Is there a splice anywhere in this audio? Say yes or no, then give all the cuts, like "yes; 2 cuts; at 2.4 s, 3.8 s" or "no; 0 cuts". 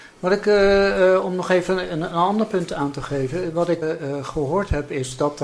yes; 1 cut; at 3.8 s